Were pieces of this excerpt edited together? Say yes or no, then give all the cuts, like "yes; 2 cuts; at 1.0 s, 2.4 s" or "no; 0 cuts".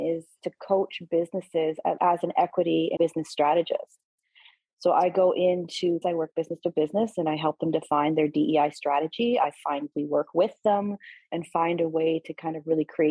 yes; 4 cuts; at 2.0 s, 3.0 s, 6.0 s, 9.9 s